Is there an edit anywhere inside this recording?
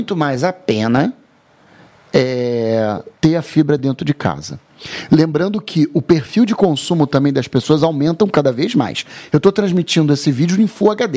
no; 0 cuts

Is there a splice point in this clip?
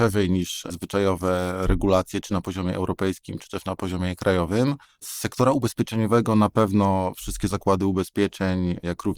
yes; 1 cut; at 4.8 s

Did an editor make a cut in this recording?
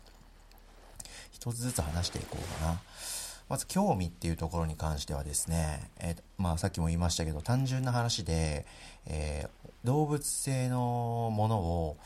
yes; 1 cut; at 9.8 s

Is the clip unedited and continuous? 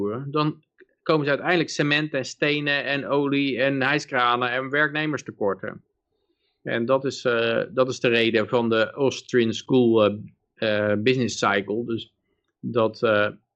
yes; 0 cuts

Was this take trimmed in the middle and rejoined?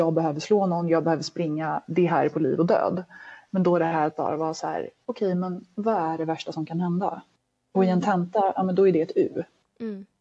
no; 0 cuts

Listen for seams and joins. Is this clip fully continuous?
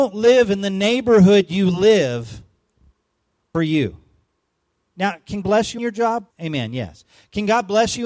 no; 4 cuts; at 3.5 s, 5.4 s, 5.8 s, 6.3 s

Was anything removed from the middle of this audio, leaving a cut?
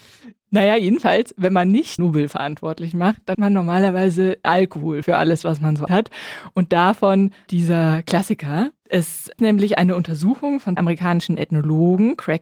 yes; 8 cuts; at 2.0 s, 3.3 s, 4.4 s, 5.0 s, 5.9 s, 7.5 s, 9.4 s, 10.8 s

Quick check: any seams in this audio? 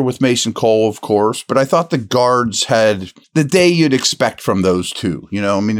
yes; 1 cut; at 3.2 s

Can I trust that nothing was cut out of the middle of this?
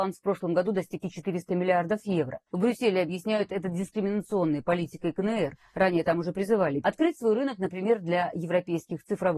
no; 3 cuts; at 1.0 s, 2.5 s, 6.8 s

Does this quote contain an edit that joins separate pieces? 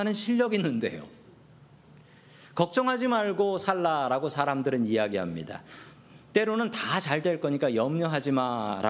yes; 1 cut; at 1.7 s

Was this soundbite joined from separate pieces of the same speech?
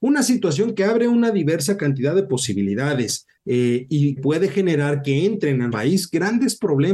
yes; 3 cuts; at 3.4 s, 4.2 s, 5.7 s

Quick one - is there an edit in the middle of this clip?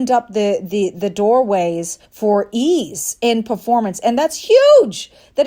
yes; 1 cut; at 2.0 s

